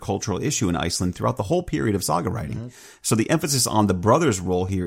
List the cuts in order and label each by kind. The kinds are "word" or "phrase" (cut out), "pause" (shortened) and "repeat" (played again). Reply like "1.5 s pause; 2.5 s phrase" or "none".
none